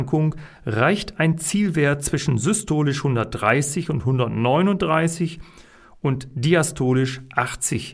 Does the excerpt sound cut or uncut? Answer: uncut